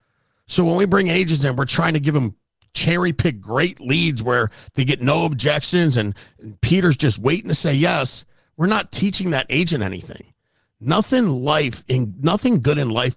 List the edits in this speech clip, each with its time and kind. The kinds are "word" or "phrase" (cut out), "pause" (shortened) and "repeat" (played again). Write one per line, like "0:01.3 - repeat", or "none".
none